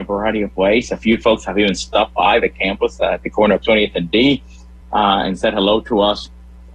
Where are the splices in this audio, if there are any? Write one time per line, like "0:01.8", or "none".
none